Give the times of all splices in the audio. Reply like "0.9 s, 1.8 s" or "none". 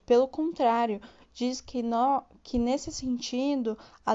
none